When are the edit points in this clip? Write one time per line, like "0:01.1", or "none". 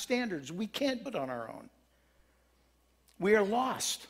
0:01.1